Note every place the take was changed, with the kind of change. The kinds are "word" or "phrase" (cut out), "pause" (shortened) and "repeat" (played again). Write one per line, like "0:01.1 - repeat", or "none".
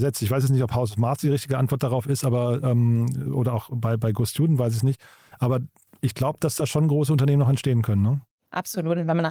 none